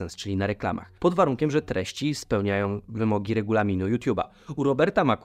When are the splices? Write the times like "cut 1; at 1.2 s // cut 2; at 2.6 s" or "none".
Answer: cut 1; at 1.0 s